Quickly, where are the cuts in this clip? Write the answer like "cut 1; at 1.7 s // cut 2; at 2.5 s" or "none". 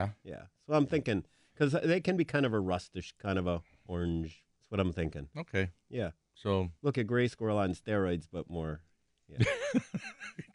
cut 1; at 4.5 s // cut 2; at 6.9 s

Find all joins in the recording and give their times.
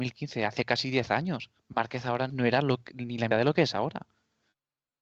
cut 1; at 1.6 s // cut 2; at 2.3 s // cut 3; at 3.3 s

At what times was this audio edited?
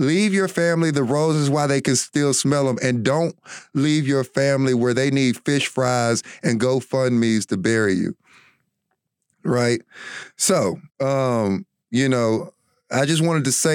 cut 1; at 10.9 s

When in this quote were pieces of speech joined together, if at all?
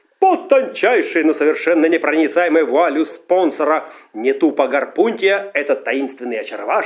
cut 1; at 3.1 s

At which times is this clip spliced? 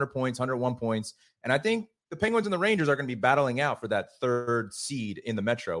none

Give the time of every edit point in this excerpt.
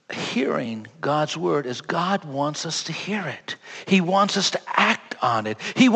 none

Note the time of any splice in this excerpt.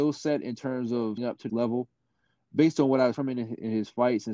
cut 1; at 1.2 s // cut 2; at 1.5 s // cut 3; at 3.1 s

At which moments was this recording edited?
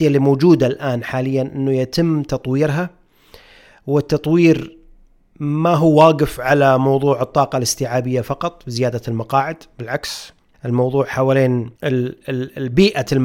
cut 1; at 5.2 s // cut 2; at 10.5 s // cut 3; at 11.8 s

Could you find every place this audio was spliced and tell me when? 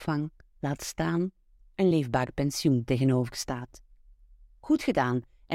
none

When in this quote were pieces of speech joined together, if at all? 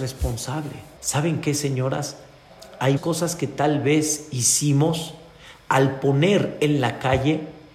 cut 1; at 1.0 s // cut 2; at 3.0 s

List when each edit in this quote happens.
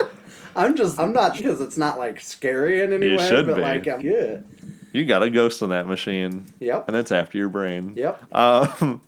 cut 1; at 1.0 s // cut 2; at 1.4 s // cut 3; at 4.0 s // cut 4; at 6.6 s

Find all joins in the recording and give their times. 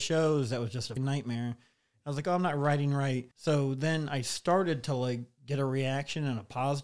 cut 1; at 1.0 s // cut 2; at 3.3 s

